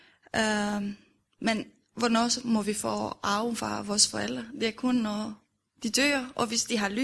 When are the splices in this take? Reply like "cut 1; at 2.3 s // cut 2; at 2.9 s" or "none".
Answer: none